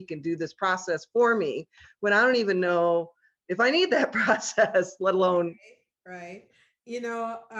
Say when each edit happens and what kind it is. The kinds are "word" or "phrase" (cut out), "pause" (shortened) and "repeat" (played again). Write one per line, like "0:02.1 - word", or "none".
none